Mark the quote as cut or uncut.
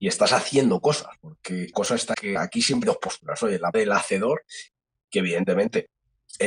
cut